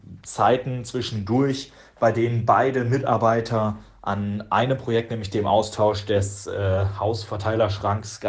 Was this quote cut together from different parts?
no; 0 cuts

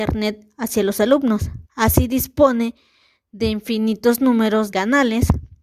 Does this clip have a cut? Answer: yes; 2 cuts; at 1.6 s, 4.7 s

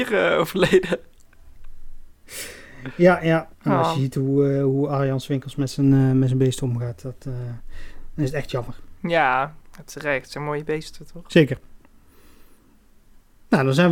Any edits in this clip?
yes; 2 cuts; at 3.5 s, 9.6 s

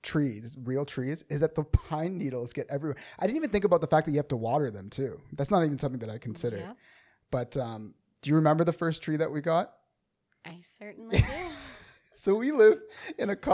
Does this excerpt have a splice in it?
no; 0 cuts

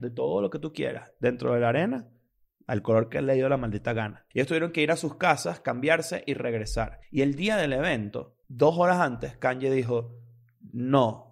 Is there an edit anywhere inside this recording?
yes; 3 cuts; at 4.3 s, 7.0 s, 8.4 s

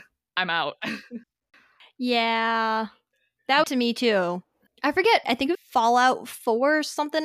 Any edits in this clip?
yes; 5 cuts; at 1.2 s, 3.6 s, 4.7 s, 5.2 s, 5.5 s

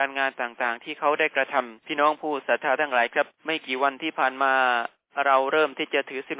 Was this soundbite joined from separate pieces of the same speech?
yes; 2 cuts; at 1.8 s, 3.3 s

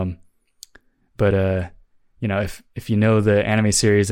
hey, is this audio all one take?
yes; 0 cuts

